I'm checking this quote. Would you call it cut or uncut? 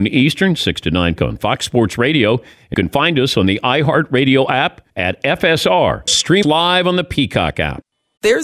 cut